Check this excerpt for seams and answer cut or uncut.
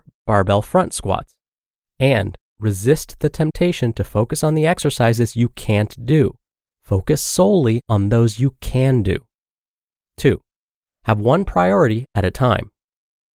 uncut